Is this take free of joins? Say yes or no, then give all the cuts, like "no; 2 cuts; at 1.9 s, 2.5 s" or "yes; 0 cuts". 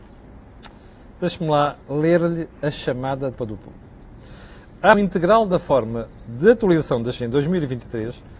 no; 4 cuts; at 1.8 s, 3.4 s, 4.9 s, 7.2 s